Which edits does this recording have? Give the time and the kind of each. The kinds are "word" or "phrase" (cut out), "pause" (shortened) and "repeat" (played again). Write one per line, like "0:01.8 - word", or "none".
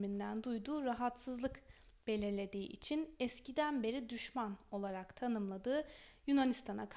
none